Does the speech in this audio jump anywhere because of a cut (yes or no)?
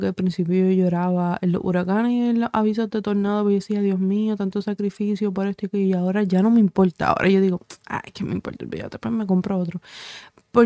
no